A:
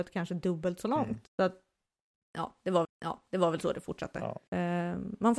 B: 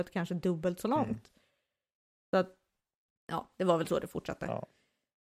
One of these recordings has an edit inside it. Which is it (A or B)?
A